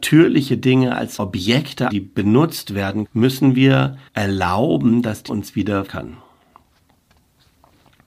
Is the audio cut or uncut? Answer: cut